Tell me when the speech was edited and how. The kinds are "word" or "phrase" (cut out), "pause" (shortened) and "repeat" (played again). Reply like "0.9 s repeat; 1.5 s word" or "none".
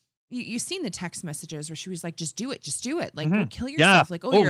none